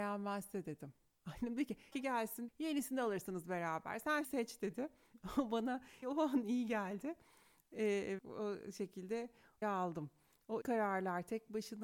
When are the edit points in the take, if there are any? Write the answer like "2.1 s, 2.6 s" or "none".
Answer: 1.9 s, 2.5 s, 4.2 s, 6.0 s, 6.4 s, 8.2 s, 9.6 s, 10.6 s